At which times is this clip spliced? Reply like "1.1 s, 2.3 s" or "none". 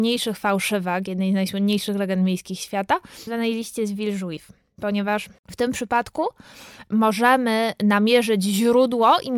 3.3 s, 5.4 s